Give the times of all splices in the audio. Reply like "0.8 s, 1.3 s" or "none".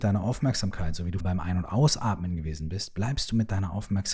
1.2 s

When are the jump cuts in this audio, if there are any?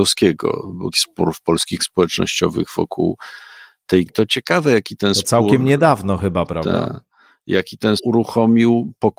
0.9 s, 1.8 s, 4.1 s, 8.0 s

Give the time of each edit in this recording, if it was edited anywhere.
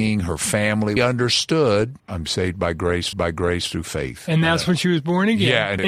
1.0 s, 2.0 s, 3.1 s

